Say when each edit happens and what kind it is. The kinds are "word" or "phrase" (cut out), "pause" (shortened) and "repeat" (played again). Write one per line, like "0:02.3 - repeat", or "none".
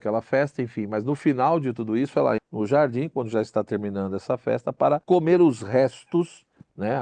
0:02.4 - word
0:05.0 - pause